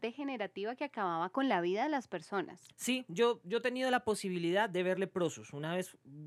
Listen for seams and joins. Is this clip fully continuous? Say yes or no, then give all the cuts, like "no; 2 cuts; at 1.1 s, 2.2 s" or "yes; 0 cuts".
no; 1 cut; at 2.7 s